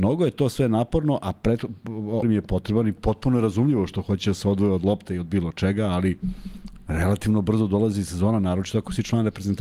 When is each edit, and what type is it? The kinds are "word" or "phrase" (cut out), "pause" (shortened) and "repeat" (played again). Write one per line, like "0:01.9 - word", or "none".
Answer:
0:02.2 - word